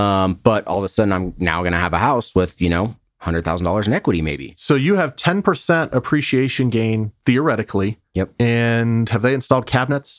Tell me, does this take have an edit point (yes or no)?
no